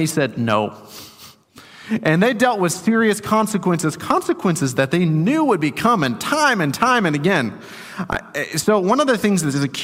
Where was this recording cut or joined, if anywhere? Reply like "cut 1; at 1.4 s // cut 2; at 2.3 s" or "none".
none